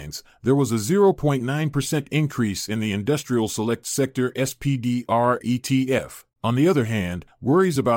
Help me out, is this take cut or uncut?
cut